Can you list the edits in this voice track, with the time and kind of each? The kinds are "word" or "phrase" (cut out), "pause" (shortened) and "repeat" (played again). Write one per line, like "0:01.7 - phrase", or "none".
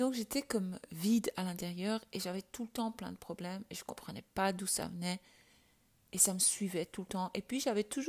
none